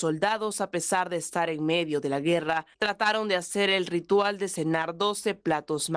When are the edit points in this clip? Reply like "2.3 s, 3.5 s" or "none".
2.7 s